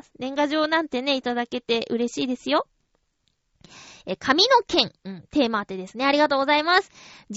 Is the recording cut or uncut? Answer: cut